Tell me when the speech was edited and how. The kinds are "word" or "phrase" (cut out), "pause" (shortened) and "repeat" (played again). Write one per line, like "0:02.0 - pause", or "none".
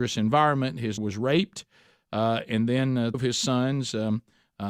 0:01.0 - word
0:03.1 - word